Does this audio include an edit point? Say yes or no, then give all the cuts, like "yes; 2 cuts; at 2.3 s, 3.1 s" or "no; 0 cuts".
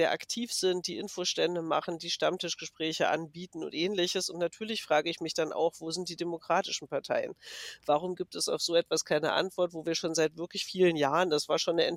no; 0 cuts